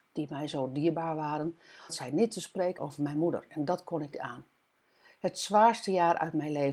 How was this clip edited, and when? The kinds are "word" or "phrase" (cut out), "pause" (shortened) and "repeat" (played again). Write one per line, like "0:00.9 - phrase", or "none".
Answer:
0:01.9 - word
0:02.8 - word
0:04.1 - word